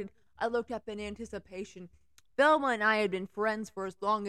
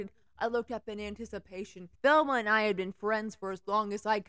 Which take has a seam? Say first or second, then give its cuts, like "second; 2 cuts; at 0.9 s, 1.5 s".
second; 1 cut; at 1.9 s